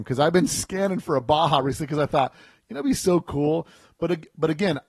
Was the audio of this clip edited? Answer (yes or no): no